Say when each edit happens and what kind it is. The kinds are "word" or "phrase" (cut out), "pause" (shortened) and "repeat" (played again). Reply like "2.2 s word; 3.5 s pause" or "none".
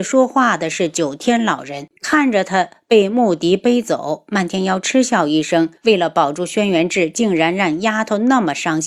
2.0 s pause; 5.8 s pause